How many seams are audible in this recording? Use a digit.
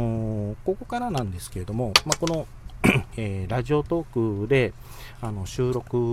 1